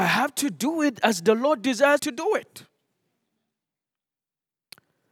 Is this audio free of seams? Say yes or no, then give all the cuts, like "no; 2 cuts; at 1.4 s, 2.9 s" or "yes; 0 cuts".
no; 1 cut; at 2.0 s